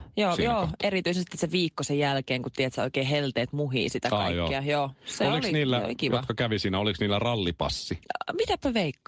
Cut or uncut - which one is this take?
uncut